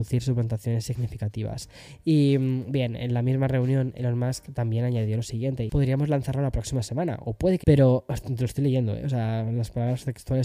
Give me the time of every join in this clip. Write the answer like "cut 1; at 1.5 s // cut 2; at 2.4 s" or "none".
cut 1; at 5.7 s // cut 2; at 7.6 s